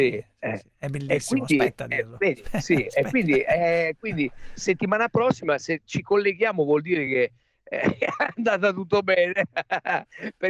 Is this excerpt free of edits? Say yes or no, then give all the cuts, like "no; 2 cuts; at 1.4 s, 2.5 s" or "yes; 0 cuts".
yes; 0 cuts